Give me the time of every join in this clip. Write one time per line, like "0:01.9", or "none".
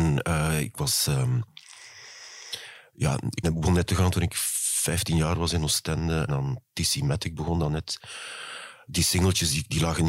0:03.4
0:03.9
0:06.3